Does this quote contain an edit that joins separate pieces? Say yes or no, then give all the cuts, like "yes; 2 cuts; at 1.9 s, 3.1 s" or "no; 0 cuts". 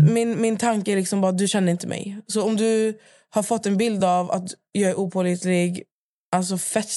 no; 0 cuts